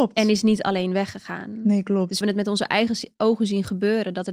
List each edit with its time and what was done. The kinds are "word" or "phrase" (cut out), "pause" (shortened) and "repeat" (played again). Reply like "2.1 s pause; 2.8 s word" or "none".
2.2 s word